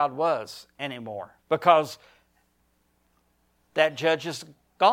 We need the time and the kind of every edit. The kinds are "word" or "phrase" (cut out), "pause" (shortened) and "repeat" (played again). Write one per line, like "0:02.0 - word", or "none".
0:01.4 - pause